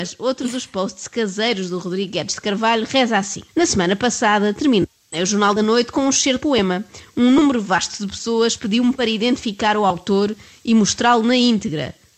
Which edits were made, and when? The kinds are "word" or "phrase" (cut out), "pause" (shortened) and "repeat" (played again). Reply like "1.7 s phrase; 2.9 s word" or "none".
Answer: 3.5 s pause; 6.4 s word